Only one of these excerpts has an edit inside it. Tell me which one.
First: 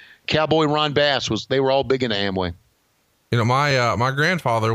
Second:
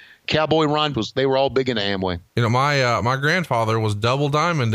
second; 2 cuts; at 0.9 s, 2.3 s

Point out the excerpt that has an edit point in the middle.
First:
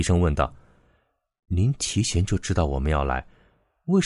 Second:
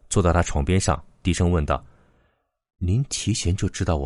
second; 1 cut; at 1.1 s

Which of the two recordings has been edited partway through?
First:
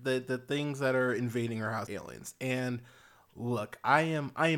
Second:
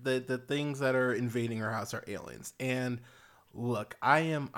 first; 1 cut; at 1.9 s

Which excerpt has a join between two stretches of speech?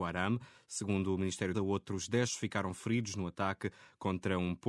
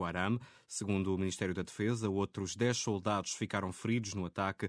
first; 2 cuts; at 1.5 s, 2.3 s

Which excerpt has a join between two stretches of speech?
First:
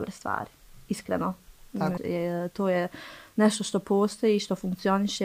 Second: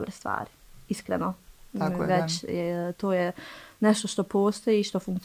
first; 1 cut; at 2.0 s

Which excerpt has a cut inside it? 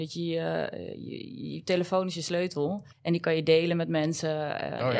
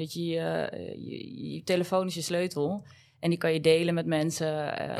first; 1 cut; at 2.9 s

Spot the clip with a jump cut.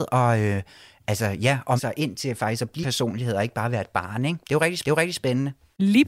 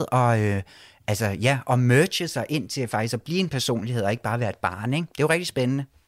first; 3 cuts; at 1.8 s, 2.8 s, 4.8 s

